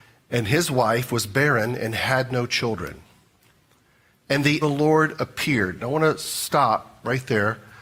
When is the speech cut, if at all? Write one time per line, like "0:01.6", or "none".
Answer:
0:04.6